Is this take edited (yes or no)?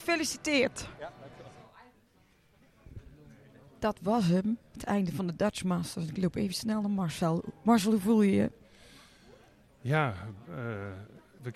no